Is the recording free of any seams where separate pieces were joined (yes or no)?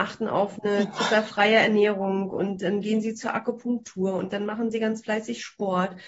yes